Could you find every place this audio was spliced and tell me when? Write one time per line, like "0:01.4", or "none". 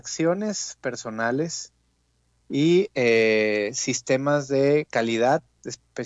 none